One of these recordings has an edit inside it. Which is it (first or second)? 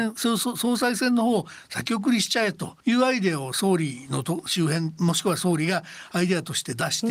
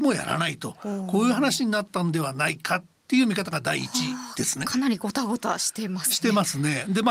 first